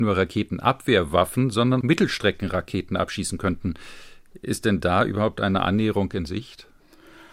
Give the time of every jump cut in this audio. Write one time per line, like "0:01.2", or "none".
0:01.8